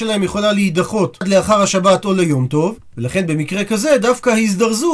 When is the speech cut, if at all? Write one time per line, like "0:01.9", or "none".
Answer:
none